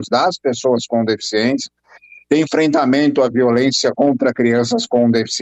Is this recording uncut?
yes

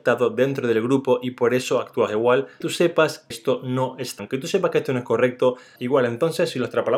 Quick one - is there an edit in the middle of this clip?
yes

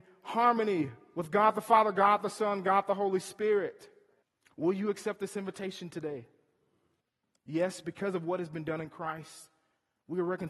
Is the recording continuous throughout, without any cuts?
yes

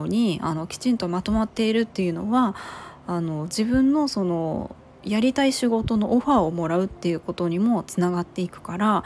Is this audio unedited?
yes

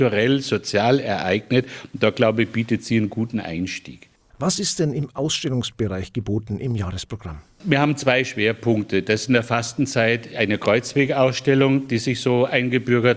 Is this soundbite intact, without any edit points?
yes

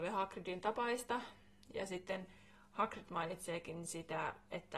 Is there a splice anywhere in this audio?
no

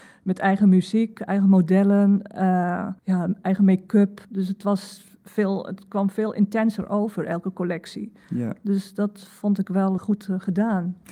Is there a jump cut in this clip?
yes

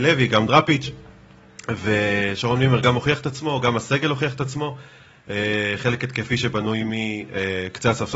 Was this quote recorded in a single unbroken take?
yes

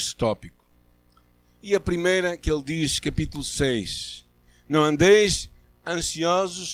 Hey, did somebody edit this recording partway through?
no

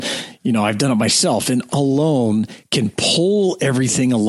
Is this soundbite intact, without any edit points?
no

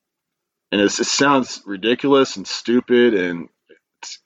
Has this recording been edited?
no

